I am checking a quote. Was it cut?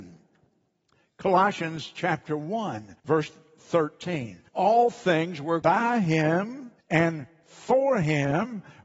yes; 4 cuts; at 3.0 s, 4.5 s, 5.6 s, 6.8 s

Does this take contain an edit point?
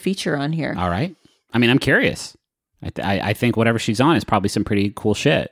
no; 0 cuts

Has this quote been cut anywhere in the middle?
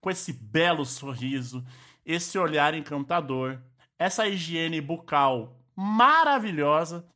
no; 0 cuts

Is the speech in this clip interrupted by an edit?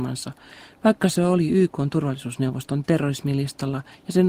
no; 0 cuts

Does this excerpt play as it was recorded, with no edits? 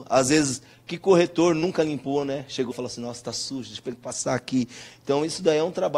no; 2 cuts; at 2.7 s, 3.9 s

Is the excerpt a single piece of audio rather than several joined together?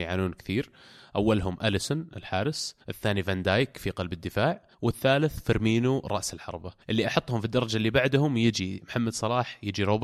no; 3 cuts; at 2.8 s, 4.7 s, 6.8 s

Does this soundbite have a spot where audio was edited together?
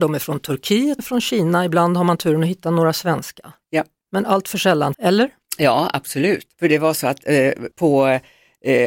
yes; 4 cuts; at 1.0 s, 4.9 s, 6.5 s, 7.7 s

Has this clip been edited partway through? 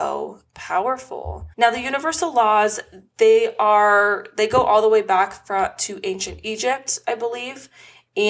yes; 1 cut; at 1.5 s

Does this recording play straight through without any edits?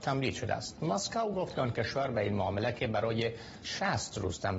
yes; 0 cuts

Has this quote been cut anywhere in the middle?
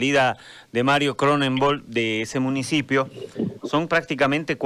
no; 0 cuts

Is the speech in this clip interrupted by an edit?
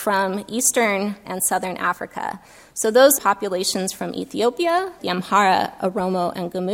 yes; 3 cuts; at 1.2 s, 3.2 s, 5.0 s

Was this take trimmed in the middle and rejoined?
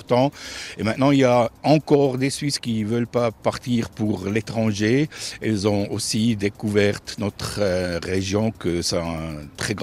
yes; 1 cut; at 1.6 s

